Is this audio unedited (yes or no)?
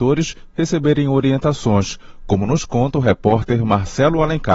yes